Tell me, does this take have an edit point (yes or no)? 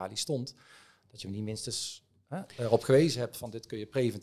no